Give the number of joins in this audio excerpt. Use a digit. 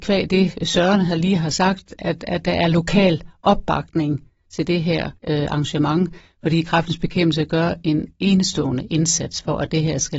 1